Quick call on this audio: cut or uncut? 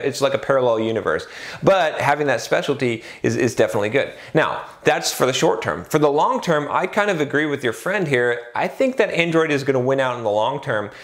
uncut